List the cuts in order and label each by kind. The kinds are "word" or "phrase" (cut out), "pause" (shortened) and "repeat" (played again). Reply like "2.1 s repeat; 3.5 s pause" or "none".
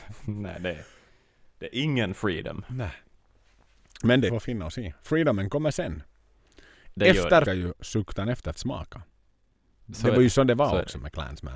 4.3 s phrase; 7.5 s phrase; 8.5 s word